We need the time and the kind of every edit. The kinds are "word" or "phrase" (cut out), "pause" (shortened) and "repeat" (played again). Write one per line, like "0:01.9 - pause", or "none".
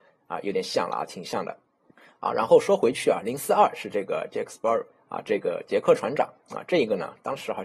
0:01.9 - pause
0:04.9 - pause